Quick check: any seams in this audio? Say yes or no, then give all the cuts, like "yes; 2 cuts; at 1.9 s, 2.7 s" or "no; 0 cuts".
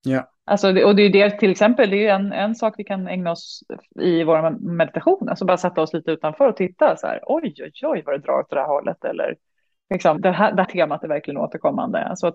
yes; 2 cuts; at 10.2 s, 10.6 s